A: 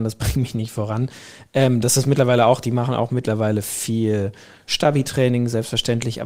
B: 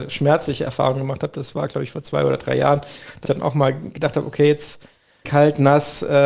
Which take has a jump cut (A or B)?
B